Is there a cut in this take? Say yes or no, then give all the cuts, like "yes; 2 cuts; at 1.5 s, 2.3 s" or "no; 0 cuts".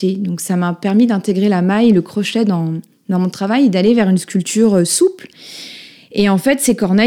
no; 0 cuts